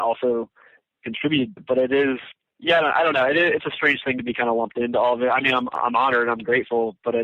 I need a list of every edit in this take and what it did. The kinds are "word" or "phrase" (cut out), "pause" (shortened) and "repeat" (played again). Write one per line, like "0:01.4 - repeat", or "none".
0:01.6 - word